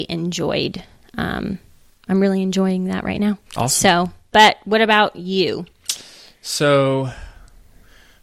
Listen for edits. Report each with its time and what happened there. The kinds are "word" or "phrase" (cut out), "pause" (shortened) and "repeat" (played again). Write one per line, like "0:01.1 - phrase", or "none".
0:03.5 - pause